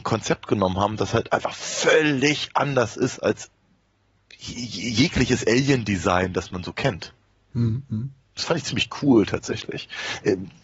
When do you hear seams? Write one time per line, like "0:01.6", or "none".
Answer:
none